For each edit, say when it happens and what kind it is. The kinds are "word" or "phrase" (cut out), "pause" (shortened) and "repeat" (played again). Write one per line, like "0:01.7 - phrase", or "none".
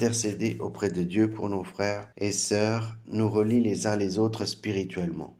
0:02.1 - pause